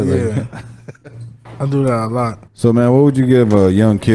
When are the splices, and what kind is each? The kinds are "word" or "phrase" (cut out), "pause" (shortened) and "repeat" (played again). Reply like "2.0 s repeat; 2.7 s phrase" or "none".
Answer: 1.0 s pause; 2.5 s pause